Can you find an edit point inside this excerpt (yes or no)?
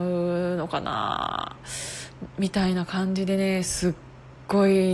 no